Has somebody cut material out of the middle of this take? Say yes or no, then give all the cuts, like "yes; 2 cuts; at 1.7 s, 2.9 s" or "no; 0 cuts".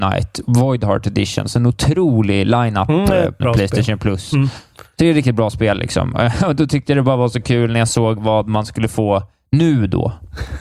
yes; 1 cut; at 3.4 s